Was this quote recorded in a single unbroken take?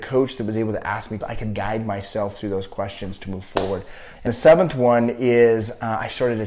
no; 3 cuts; at 1.2 s, 1.6 s, 4.3 s

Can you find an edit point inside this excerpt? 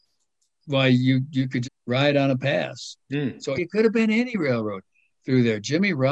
yes; 3 cuts; at 1.6 s, 3.0 s, 3.6 s

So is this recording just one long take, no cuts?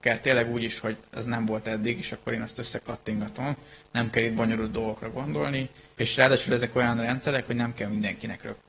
no; 1 cut; at 6.0 s

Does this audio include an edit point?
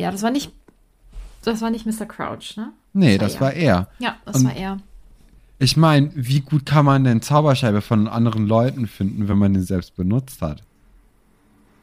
no; 0 cuts

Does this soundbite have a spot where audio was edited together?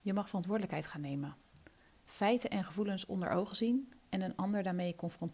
no; 0 cuts

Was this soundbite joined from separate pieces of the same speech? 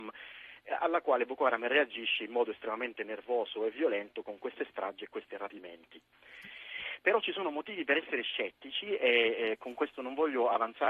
no; 0 cuts

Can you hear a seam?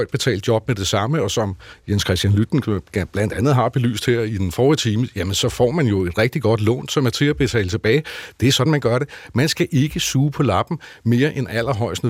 no; 0 cuts

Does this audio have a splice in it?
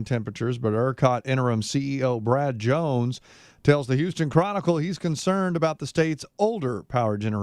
no; 0 cuts

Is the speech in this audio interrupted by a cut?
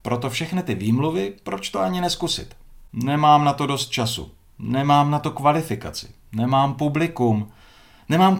no; 0 cuts

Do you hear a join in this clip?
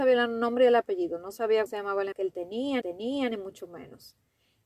yes; 3 cuts; at 1.7 s, 2.1 s, 2.8 s

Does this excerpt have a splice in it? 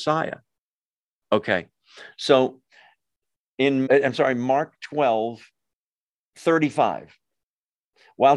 yes; 1 cut; at 3.9 s

